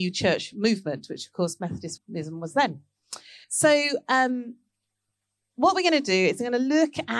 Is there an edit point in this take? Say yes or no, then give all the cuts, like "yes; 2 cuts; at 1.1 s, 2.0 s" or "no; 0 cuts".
yes; 2 cuts; at 2.0 s, 3.4 s